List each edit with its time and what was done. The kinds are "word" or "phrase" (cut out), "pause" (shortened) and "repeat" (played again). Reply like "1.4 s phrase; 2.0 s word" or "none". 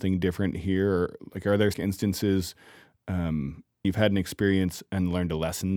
1.7 s word; 3.8 s word